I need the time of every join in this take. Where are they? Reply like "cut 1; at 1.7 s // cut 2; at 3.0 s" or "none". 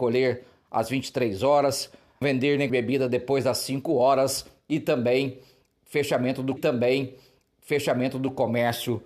cut 1; at 2.2 s // cut 2; at 2.7 s // cut 3; at 6.6 s